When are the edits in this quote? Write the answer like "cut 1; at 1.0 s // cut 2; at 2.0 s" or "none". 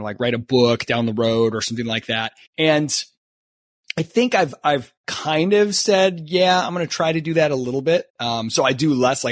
cut 1; at 2.5 s // cut 2; at 5.0 s // cut 3; at 8.1 s